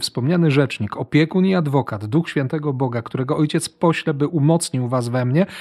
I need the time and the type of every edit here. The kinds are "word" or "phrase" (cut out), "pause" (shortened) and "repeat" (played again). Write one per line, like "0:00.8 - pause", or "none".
none